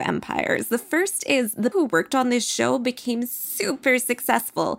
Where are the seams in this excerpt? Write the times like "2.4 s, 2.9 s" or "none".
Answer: 1.7 s